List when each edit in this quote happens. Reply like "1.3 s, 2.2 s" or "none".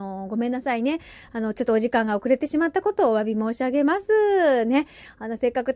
none